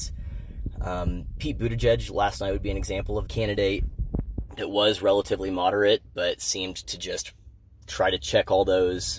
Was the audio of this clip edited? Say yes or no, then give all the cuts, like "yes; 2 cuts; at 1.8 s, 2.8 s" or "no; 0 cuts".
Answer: yes; 1 cut; at 3.3 s